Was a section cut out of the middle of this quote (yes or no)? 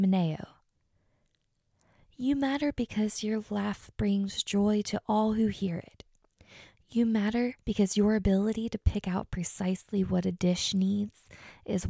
yes